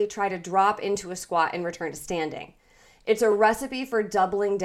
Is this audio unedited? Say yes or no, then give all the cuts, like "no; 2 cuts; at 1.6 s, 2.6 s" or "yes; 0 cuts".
yes; 0 cuts